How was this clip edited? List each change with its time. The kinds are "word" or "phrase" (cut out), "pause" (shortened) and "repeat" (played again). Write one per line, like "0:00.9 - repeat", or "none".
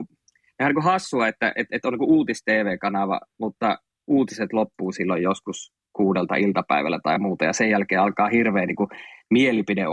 none